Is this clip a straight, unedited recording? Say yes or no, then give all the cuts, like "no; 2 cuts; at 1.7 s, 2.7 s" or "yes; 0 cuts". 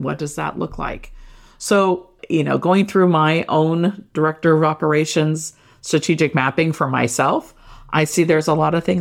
yes; 0 cuts